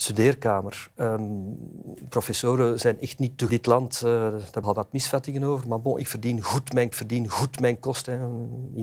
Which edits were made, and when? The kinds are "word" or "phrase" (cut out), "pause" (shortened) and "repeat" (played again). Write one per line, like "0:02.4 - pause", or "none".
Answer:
0:03.5 - phrase
0:04.6 - word
0:06.9 - repeat